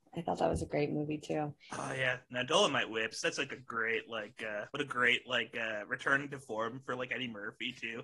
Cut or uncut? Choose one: cut